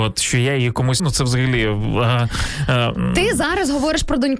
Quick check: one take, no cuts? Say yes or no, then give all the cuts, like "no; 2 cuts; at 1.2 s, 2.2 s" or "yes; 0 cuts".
no; 1 cut; at 1.0 s